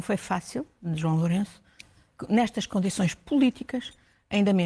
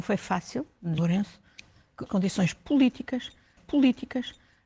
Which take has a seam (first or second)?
second